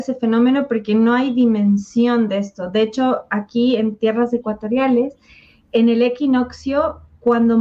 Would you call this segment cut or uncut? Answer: uncut